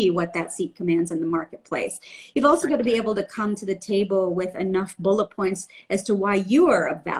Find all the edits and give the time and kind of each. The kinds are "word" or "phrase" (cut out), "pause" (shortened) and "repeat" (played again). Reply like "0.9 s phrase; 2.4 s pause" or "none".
none